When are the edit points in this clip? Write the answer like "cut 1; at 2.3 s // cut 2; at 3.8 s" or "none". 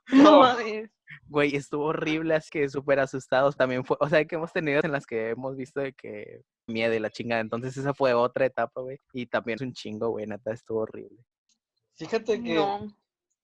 cut 1; at 2.5 s // cut 2; at 3.6 s // cut 3; at 4.3 s // cut 4; at 4.8 s // cut 5; at 6.7 s // cut 6; at 9.0 s // cut 7; at 9.6 s // cut 8; at 11.5 s